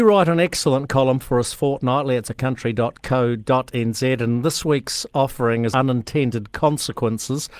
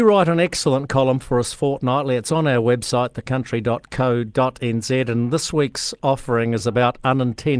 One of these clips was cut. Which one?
first; 2 cuts; at 2.2 s, 5.7 s

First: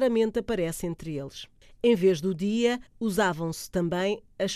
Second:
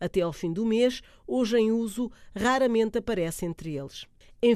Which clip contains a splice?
first; 1 cut; at 2.9 s

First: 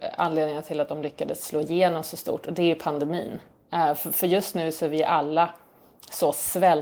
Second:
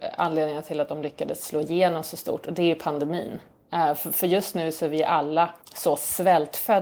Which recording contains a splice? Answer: second; 1 cut; at 5.6 s

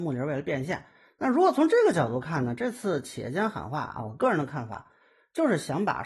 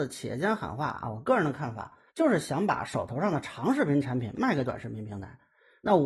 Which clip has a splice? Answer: second; 1 cut; at 2.1 s

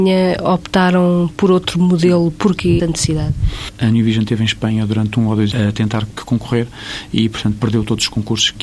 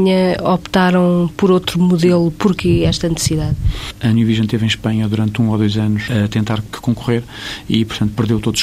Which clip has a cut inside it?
first; 2 cuts; at 2.8 s, 5.5 s

